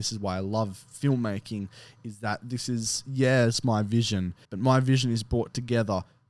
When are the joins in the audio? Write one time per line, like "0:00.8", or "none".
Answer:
0:04.4